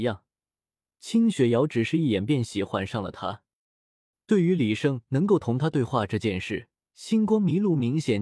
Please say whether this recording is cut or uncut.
cut